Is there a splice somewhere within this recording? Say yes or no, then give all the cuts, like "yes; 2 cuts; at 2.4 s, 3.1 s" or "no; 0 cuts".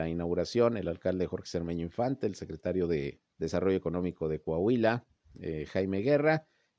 yes; 1 cut; at 3.3 s